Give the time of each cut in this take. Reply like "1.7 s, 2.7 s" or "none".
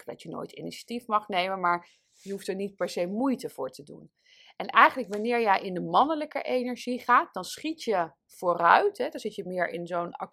8.2 s